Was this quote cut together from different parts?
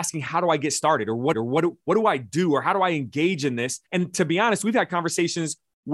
yes; 2 cuts; at 1.3 s, 3.9 s

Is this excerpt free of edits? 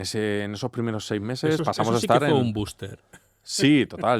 yes; 0 cuts

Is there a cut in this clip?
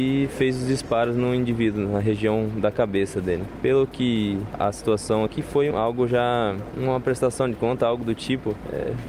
yes; 2 cuts; at 5.3 s, 5.7 s

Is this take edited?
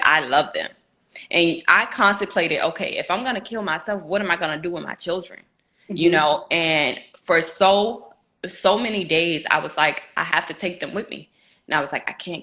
no; 0 cuts

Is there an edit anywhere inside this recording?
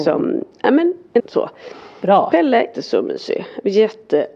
yes; 2 cuts; at 1.2 s, 2.7 s

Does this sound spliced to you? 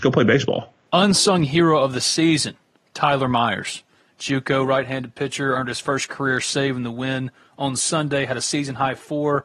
no; 0 cuts

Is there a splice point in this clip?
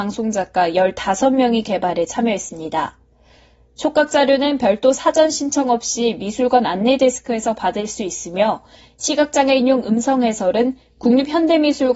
no; 0 cuts

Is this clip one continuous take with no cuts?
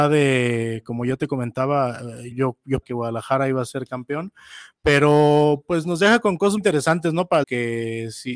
no; 4 cuts; at 2.3 s, 2.8 s, 6.6 s, 7.4 s

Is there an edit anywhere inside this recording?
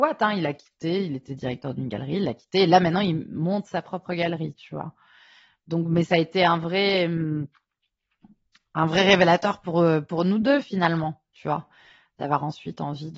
no; 0 cuts

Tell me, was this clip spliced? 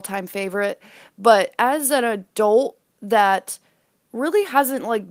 no; 0 cuts

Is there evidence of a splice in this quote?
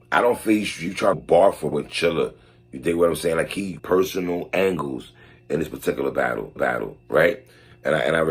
yes; 4 cuts; at 1.1 s, 1.7 s, 3.8 s, 6.6 s

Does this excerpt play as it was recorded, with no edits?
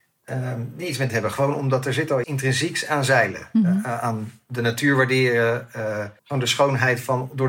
no; 3 cuts; at 1.1 s, 2.2 s, 6.2 s

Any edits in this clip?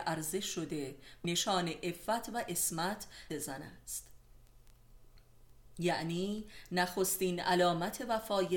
yes; 2 cuts; at 1.2 s, 3.3 s

